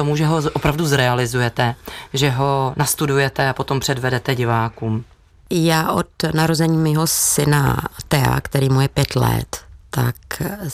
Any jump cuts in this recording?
no; 0 cuts

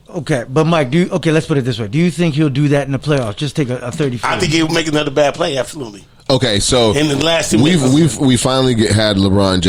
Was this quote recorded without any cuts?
yes; 0 cuts

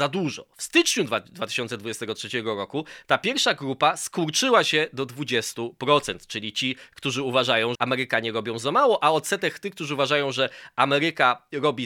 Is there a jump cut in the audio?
yes; 1 cut; at 7.7 s

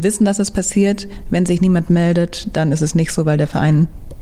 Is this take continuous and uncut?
yes; 0 cuts

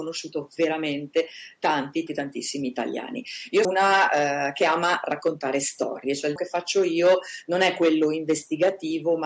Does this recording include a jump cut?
yes; 3 cuts; at 2.1 s, 3.6 s, 6.4 s

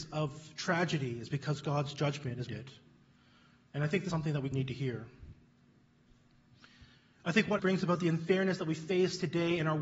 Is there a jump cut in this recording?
yes; 4 cuts; at 2.5 s, 4.1 s, 4.5 s, 7.6 s

